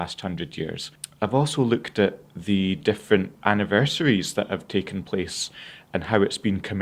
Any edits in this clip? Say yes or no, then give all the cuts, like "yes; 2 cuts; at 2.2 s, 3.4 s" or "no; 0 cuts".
yes; 2 cuts; at 2.3 s, 3.3 s